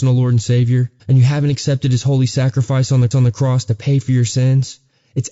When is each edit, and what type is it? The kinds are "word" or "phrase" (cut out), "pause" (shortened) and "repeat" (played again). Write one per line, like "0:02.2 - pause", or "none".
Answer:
0:01.0 - pause
0:03.1 - repeat